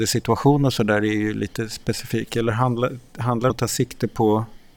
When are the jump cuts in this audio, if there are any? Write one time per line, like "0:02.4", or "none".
0:03.5